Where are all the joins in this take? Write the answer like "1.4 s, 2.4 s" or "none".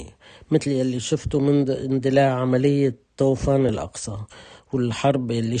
none